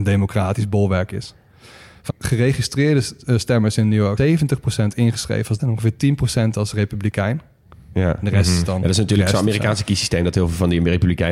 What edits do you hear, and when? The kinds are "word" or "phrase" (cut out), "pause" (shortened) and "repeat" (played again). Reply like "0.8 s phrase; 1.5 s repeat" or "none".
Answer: 2.1 s word; 4.2 s word; 5.6 s word